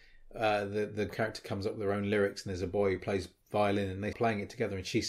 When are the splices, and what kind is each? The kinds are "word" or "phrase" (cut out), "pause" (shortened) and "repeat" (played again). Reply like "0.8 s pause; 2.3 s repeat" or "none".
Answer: 1.1 s word; 4.1 s word